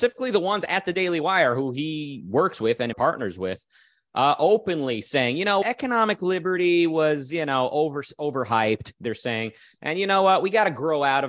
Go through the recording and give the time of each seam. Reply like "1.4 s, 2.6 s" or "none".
2.9 s, 5.6 s